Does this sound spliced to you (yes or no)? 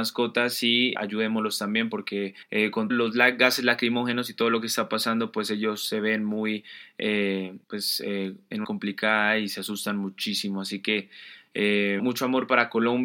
yes